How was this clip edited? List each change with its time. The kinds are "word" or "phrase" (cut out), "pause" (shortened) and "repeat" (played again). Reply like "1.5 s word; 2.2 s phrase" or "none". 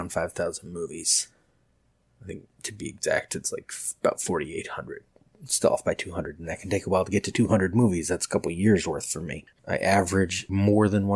none